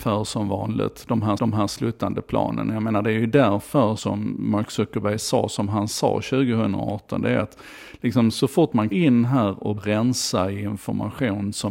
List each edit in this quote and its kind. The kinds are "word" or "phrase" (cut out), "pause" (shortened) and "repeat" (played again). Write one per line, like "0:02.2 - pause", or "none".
0:01.4 - repeat
0:04.0 - word
0:08.9 - word
0:09.8 - word